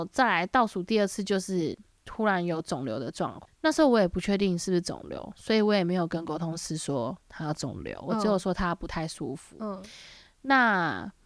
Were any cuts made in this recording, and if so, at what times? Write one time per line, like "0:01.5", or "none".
0:03.4

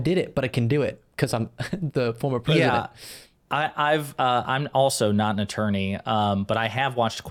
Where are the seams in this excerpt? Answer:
none

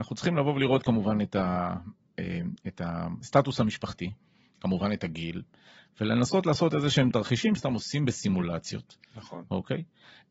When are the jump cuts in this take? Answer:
0:07.6

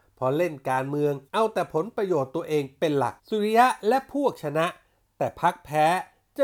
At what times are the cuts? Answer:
0:01.3
0:03.2

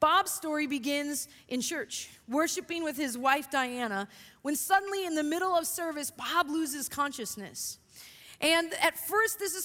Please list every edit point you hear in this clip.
none

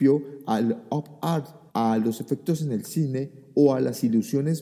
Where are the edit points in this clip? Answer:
0:01.7

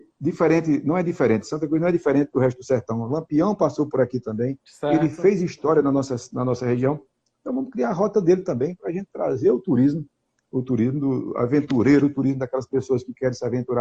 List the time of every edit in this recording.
none

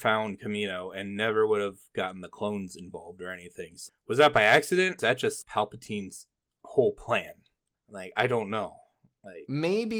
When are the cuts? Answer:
0:03.9
0:05.0
0:05.4

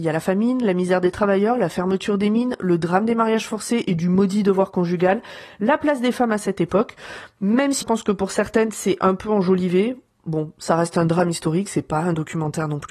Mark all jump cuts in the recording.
0:07.8

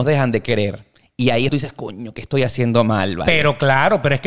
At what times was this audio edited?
0:01.5

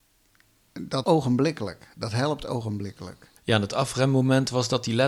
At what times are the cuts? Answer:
0:01.0
0:03.4

